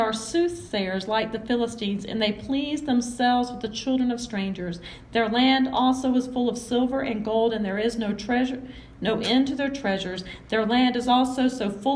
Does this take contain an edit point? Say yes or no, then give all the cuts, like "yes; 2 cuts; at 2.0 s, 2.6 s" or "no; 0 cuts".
no; 0 cuts